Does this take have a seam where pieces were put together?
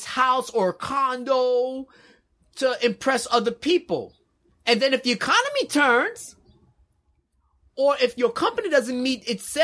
no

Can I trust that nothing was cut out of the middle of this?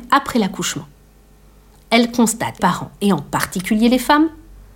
no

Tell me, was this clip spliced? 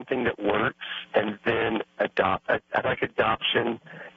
yes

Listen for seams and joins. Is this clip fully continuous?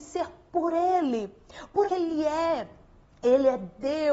no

